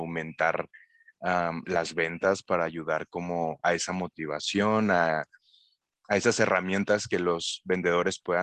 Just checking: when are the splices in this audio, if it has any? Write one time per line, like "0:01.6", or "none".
none